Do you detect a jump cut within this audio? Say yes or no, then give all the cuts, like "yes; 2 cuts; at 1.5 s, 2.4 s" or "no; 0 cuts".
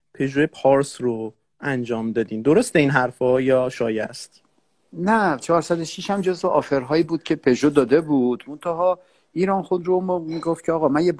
no; 0 cuts